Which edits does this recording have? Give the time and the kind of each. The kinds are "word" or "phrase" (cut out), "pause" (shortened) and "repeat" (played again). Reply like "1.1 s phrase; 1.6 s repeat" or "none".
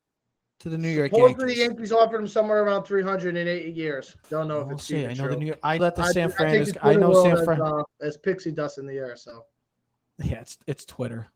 4.2 s pause; 5.8 s word; 7.9 s pause